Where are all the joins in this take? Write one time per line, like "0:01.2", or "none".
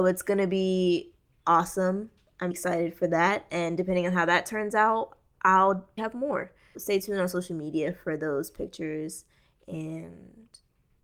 0:02.5
0:06.0
0:06.7